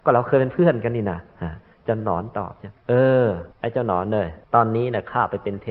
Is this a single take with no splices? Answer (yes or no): no